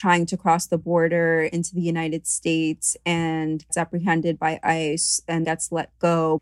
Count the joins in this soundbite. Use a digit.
2